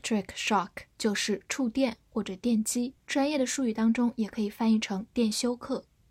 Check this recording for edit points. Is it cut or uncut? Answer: cut